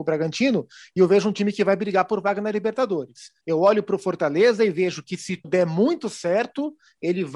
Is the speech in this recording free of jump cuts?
no; 2 cuts; at 3.4 s, 5.4 s

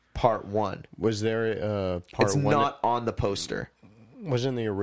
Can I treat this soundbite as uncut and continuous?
yes; 0 cuts

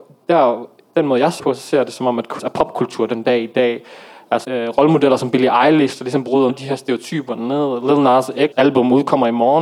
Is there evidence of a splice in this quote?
yes; 5 cuts; at 1.4 s, 2.4 s, 4.4 s, 6.5 s, 8.5 s

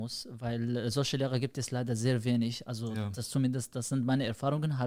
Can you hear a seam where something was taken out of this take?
no; 0 cuts

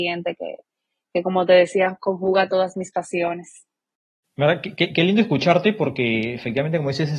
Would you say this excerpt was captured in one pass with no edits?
yes; 0 cuts

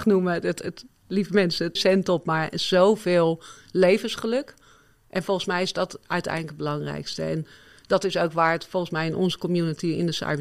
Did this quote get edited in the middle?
yes; 1 cut; at 1.8 s

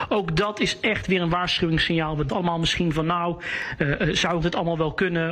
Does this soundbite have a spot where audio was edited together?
yes; 2 cuts; at 2.3 s, 4.4 s

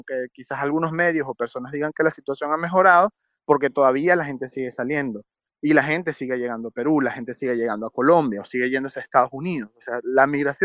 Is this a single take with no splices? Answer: yes; 0 cuts

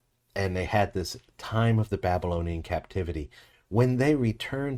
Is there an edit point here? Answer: no; 0 cuts

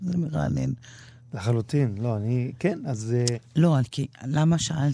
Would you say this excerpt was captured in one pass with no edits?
yes; 0 cuts

